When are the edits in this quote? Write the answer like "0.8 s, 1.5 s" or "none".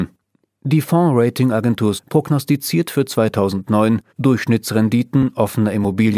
2.0 s, 4.1 s